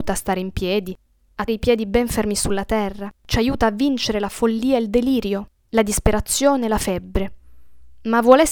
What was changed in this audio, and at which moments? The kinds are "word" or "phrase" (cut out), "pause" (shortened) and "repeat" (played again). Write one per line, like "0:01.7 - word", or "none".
0:01.5 - word
0:03.2 - pause